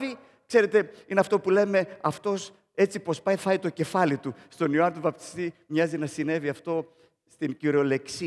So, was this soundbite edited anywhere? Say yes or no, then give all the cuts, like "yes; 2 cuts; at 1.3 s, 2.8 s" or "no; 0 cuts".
yes; 1 cut; at 3.4 s